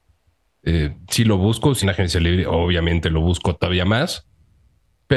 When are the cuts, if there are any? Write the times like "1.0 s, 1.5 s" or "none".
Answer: 1.8 s